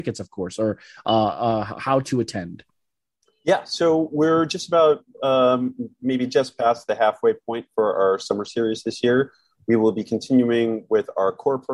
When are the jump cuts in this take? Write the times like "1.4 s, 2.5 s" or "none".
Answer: none